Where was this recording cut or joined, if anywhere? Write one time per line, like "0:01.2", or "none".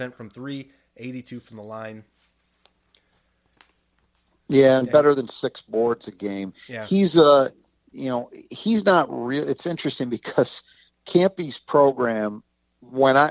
none